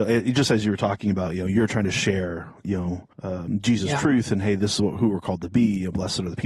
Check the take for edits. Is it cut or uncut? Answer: cut